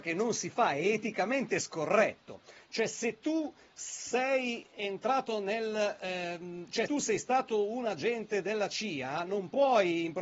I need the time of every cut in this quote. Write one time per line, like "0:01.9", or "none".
0:06.9